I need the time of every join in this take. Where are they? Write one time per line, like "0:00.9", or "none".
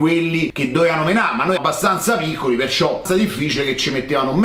0:01.6
0:03.1